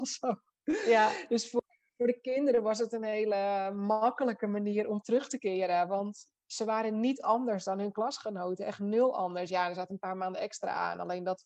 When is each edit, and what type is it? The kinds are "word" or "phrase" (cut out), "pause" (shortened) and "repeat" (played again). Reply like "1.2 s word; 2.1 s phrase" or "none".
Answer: none